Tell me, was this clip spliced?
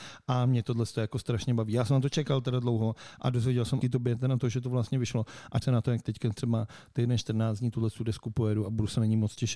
yes; 2 cuts; at 3.8 s, 5.6 s

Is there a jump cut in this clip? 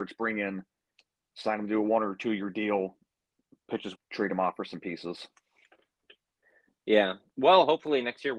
yes; 1 cut; at 4.0 s

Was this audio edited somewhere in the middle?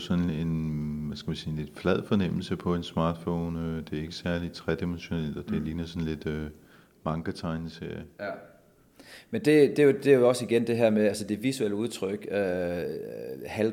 no; 0 cuts

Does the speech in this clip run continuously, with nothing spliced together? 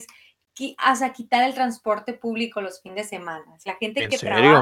no; 1 cut; at 3.7 s

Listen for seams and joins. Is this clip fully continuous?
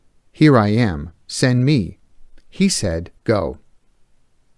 no; 1 cut; at 3.2 s

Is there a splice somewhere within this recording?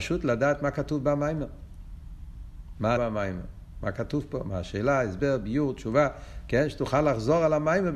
yes; 1 cut; at 3.0 s

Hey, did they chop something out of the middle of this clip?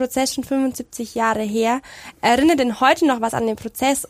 no; 0 cuts

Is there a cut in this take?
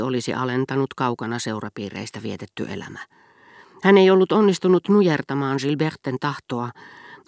no; 0 cuts

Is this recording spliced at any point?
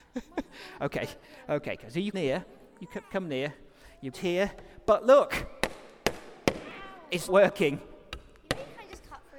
yes; 3 cuts; at 2.1 s, 4.1 s, 7.3 s

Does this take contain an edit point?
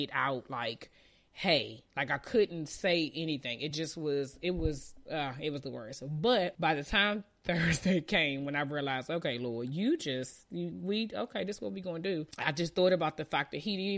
no; 0 cuts

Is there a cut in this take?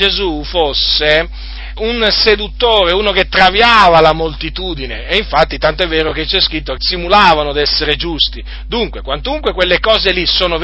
yes; 2 cuts; at 1.8 s, 6.8 s

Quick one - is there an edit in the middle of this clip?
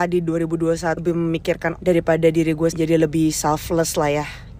yes; 3 cuts; at 1.0 s, 1.8 s, 2.7 s

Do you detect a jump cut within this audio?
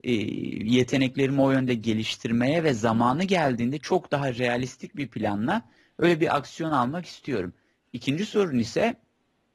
no; 0 cuts

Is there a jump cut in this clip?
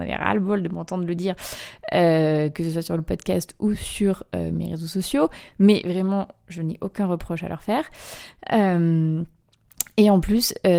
no; 0 cuts

